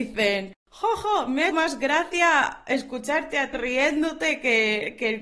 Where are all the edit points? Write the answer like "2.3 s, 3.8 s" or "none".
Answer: 1.5 s, 3.5 s